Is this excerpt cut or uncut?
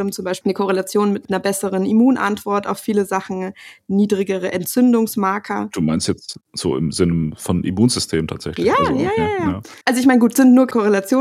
cut